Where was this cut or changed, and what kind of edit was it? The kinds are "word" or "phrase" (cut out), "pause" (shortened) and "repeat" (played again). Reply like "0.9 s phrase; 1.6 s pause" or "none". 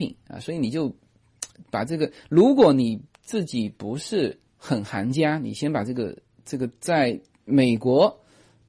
4.5 s pause